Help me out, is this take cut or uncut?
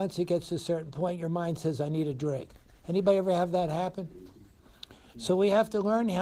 uncut